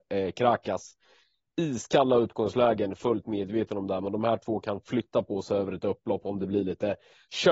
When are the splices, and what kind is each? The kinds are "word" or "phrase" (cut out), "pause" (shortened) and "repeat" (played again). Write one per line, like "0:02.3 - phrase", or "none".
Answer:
none